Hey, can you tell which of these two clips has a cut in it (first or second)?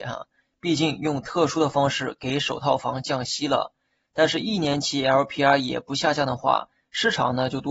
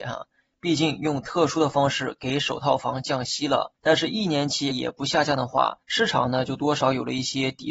second